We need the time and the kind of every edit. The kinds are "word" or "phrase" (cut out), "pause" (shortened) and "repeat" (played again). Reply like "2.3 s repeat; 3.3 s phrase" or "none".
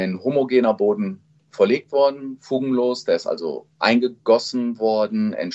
none

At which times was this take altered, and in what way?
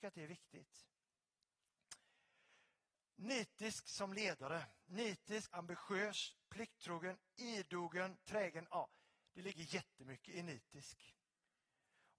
5.5 s word

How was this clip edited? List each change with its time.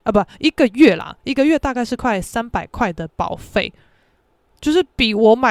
none

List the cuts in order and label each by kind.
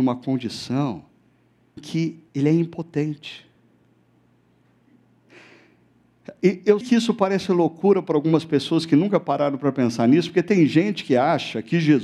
1.8 s word; 2.3 s pause; 6.8 s word

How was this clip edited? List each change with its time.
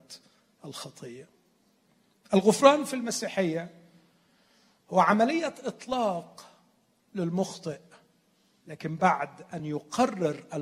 none

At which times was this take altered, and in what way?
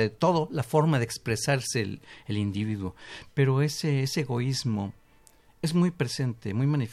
none

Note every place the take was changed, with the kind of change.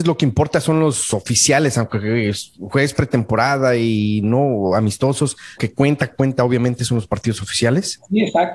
5.6 s word; 6.1 s word

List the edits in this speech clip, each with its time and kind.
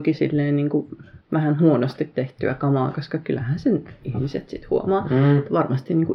1.2 s pause

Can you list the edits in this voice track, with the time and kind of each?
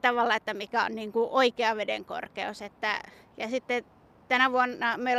none

